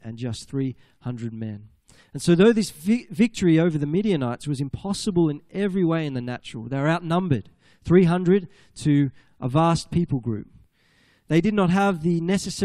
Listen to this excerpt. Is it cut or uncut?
uncut